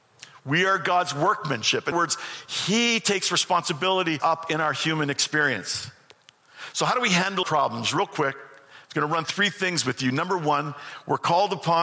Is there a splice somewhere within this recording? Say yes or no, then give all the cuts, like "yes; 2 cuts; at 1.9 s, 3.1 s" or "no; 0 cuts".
yes; 4 cuts; at 1.9 s, 4.2 s, 7.4 s, 9.2 s